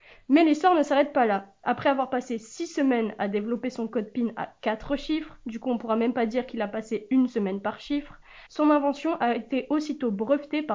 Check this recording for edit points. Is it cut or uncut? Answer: cut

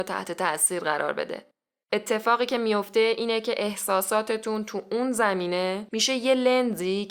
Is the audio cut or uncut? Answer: uncut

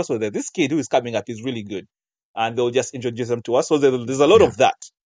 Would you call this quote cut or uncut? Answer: uncut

